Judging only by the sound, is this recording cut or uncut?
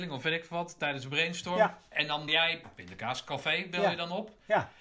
cut